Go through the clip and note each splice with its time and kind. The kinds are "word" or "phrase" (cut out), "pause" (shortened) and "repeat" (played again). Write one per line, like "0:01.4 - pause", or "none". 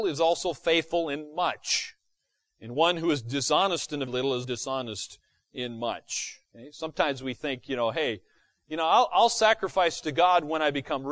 0:04.1 - word
0:04.4 - word
0:06.4 - pause